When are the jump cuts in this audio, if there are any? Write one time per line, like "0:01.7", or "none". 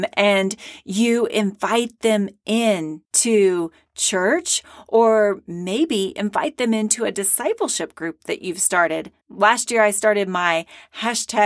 0:03.0
0:09.2